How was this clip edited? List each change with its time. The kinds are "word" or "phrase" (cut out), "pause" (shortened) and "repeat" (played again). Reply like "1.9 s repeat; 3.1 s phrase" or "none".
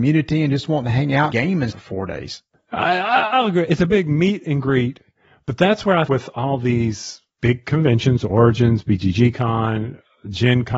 1.3 s word; 1.7 s word; 6.1 s word; 7.3 s pause